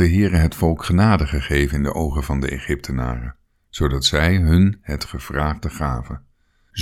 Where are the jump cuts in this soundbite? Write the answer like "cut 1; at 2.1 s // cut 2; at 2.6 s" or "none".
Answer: none